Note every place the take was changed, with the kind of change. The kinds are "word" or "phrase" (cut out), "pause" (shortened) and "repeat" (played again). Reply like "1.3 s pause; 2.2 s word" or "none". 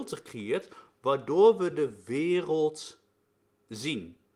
none

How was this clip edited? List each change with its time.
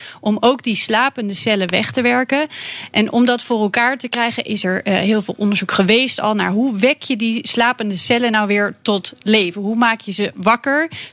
none

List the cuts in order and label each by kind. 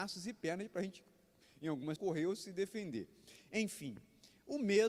2.0 s word

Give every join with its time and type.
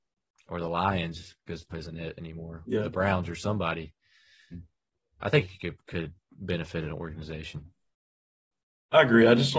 1.7 s word; 2.6 s word

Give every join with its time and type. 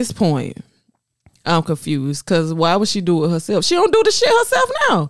none

